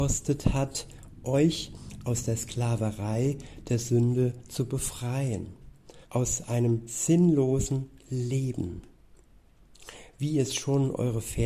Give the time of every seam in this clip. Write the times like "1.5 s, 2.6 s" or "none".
6.0 s